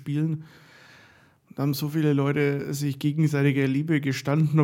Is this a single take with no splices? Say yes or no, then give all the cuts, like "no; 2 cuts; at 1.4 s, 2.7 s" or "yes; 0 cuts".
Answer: yes; 0 cuts